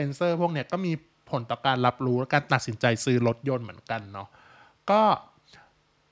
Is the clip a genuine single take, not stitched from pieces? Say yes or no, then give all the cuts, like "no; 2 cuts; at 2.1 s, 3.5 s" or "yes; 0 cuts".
yes; 0 cuts